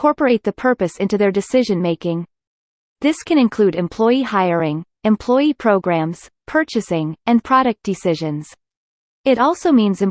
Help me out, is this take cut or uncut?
uncut